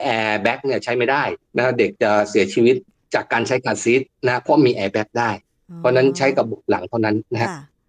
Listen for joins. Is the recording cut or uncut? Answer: cut